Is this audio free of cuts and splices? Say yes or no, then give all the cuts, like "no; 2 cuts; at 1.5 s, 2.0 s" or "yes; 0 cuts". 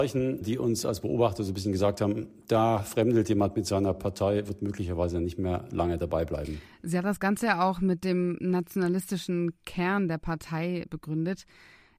yes; 0 cuts